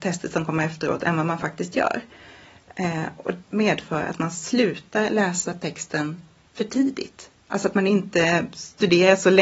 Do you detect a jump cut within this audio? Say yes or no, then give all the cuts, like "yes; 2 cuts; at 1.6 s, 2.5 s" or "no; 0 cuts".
yes; 2 cuts; at 3.5 s, 7.4 s